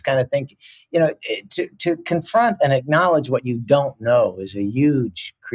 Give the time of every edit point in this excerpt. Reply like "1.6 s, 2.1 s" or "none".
none